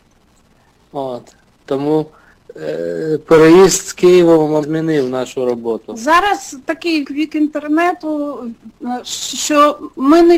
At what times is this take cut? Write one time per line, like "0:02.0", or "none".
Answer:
0:04.6
0:07.0